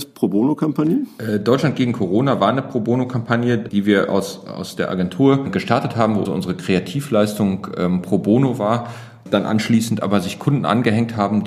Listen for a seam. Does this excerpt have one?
yes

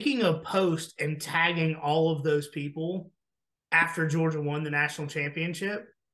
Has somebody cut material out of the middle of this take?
no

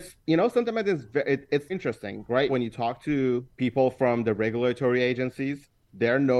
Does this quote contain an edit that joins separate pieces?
yes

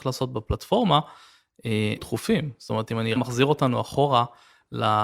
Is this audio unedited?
no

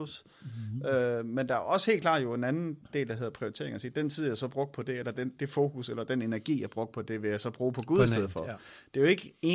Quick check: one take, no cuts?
yes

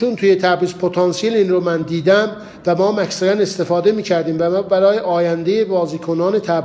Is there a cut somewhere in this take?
no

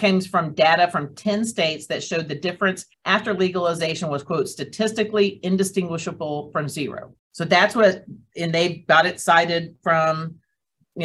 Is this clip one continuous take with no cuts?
no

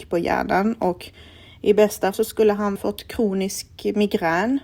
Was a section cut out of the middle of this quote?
yes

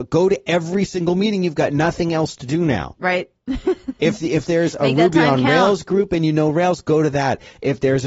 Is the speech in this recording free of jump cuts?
yes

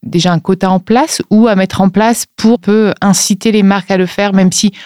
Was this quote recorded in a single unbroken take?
no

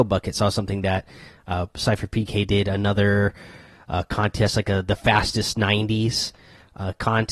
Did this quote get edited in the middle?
no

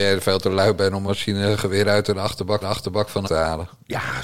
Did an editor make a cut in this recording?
yes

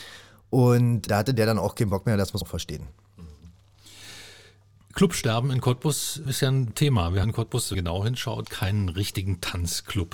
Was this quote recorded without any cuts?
no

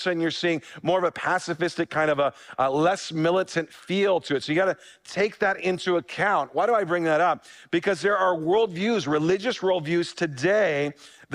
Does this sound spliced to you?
no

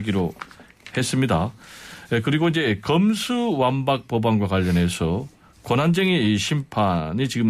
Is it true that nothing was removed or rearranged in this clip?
yes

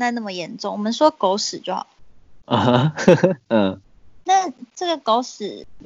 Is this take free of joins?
yes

